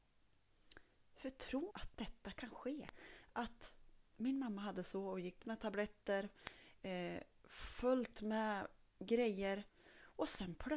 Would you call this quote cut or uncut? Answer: cut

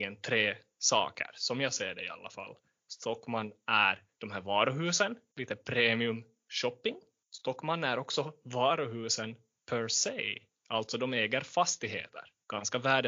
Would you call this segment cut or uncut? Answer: uncut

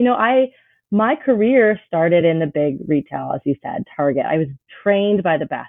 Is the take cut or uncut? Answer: uncut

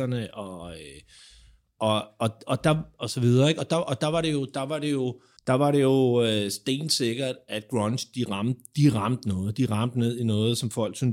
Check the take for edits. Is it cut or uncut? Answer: cut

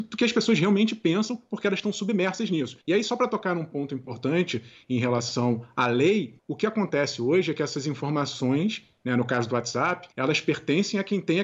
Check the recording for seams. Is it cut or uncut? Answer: cut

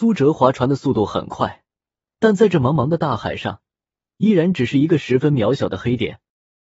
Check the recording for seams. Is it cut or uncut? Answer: uncut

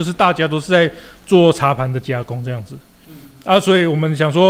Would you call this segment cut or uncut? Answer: uncut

